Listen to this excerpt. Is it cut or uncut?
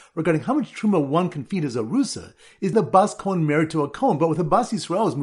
cut